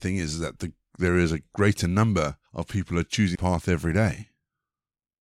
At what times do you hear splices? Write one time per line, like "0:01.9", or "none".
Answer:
0:02.5
0:03.3